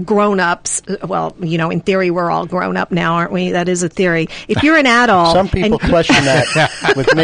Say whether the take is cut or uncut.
uncut